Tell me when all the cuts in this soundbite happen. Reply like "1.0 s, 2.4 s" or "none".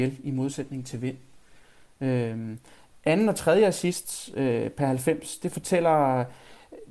none